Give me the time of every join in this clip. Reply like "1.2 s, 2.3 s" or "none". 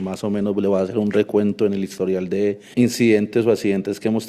2.7 s